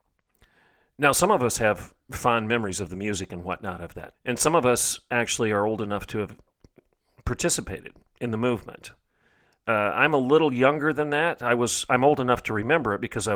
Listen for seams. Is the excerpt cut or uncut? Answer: cut